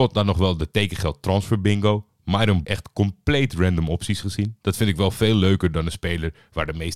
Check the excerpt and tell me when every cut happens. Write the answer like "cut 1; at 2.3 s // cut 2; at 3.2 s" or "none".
cut 1; at 2.6 s